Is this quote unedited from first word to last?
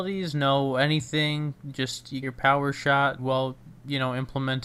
no; 2 cuts; at 2.2 s, 3.2 s

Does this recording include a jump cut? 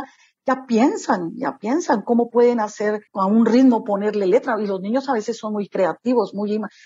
yes; 1 cut; at 3.1 s

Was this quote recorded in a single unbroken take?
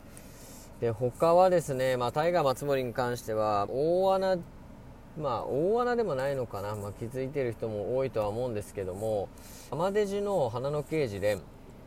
no; 2 cuts; at 3.7 s, 9.7 s

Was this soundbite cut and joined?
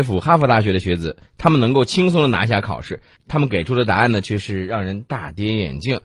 no; 0 cuts

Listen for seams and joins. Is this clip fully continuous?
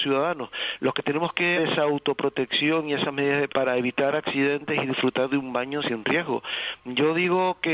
no; 3 cuts; at 1.6 s, 3.5 s, 5.8 s

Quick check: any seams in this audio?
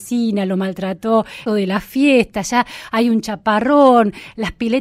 yes; 1 cut; at 1.5 s

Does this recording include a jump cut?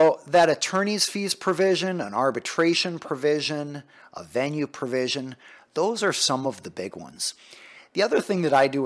no; 0 cuts

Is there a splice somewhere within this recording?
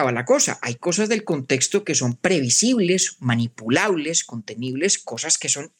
no; 0 cuts

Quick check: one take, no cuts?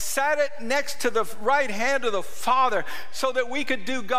yes; 0 cuts

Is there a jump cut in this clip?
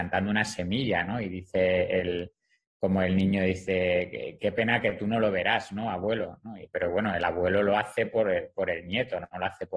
no; 0 cuts

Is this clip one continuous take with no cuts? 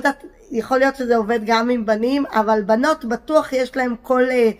yes; 0 cuts

